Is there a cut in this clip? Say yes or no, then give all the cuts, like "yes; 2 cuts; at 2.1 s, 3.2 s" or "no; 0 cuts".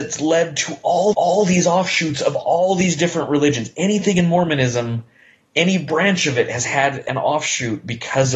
yes; 1 cut; at 1.1 s